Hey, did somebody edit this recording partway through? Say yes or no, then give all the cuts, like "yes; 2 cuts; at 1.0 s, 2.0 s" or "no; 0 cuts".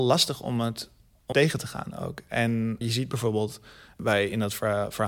yes; 2 cuts; at 1.3 s, 2.8 s